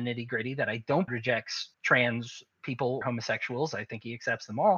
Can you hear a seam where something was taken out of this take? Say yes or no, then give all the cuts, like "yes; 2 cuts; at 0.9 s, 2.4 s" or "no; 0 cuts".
yes; 3 cuts; at 1.1 s, 1.7 s, 3.0 s